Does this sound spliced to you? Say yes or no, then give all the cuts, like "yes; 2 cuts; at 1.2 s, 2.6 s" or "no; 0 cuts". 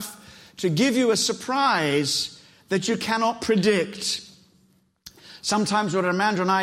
no; 0 cuts